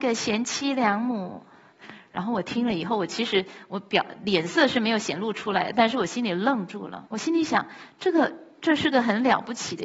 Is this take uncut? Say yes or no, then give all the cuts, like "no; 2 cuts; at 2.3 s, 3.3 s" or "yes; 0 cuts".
no; 1 cut; at 7.1 s